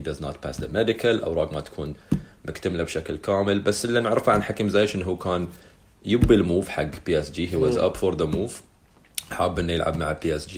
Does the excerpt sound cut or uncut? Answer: uncut